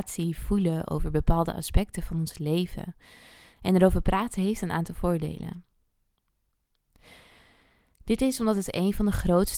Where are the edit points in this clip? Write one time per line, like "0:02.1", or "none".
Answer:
none